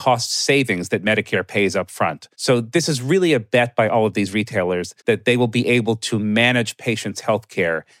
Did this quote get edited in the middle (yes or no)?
yes